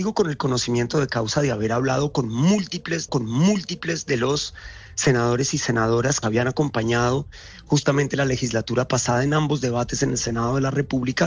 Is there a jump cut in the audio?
yes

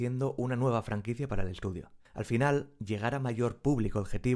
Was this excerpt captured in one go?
no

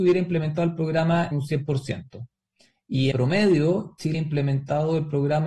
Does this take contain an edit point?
yes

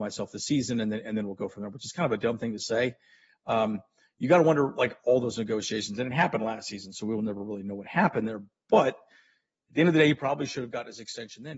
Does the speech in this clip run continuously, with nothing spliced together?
yes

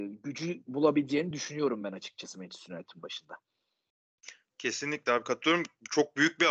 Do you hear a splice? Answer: no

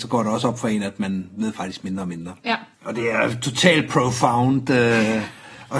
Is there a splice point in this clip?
yes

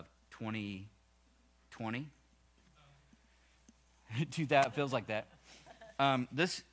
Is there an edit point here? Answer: no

